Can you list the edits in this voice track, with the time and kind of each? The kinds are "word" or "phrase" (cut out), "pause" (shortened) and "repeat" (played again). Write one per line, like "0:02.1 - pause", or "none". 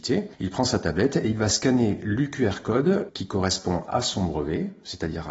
none